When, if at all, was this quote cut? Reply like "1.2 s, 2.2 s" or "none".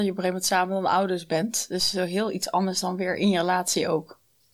none

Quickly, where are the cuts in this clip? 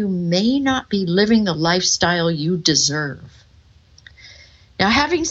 none

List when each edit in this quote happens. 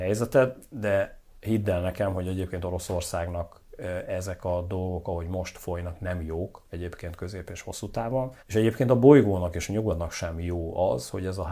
8.4 s

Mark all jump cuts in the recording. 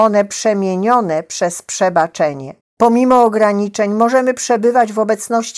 none

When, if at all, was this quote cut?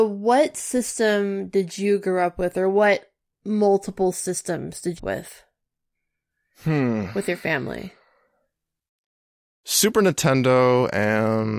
5.0 s

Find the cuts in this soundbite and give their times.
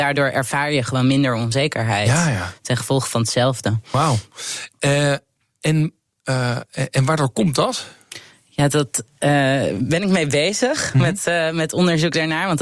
none

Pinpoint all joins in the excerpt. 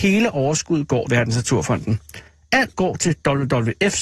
1.1 s, 2.7 s

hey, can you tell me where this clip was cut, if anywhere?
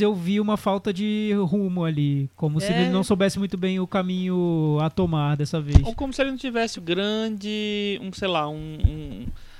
6.8 s

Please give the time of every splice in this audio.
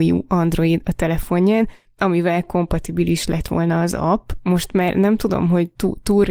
none

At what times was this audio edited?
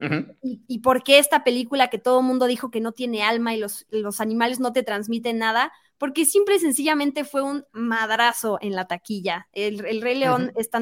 3.9 s

